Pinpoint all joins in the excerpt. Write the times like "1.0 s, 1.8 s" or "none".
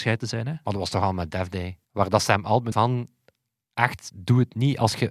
1.8 s, 2.7 s